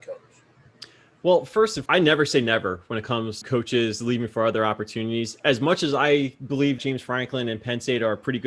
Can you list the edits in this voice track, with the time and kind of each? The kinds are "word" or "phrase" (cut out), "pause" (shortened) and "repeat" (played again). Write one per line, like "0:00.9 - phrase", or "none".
0:01.9 - word
0:03.4 - word
0:06.8 - word